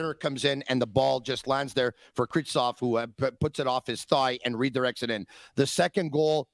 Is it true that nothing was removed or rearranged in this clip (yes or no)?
yes